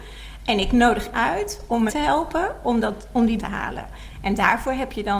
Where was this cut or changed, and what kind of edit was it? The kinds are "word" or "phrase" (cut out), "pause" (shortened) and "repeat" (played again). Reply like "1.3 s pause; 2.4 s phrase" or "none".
1.1 s word; 1.9 s word; 3.4 s word